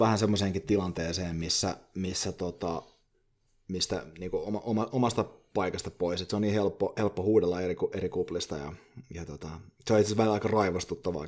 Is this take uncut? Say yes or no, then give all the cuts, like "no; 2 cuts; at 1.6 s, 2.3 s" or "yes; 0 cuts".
yes; 0 cuts